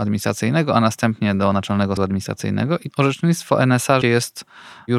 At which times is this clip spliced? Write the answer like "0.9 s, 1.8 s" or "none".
2.0 s, 2.9 s, 4.0 s